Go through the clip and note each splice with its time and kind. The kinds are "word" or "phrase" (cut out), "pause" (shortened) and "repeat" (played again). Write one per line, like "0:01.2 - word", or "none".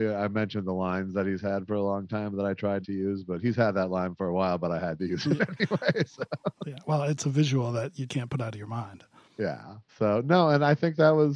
0:02.8 - word
0:08.1 - word
0:09.9 - pause